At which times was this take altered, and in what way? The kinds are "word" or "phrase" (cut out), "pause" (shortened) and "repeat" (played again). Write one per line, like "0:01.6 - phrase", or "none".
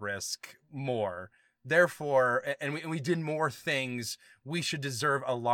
none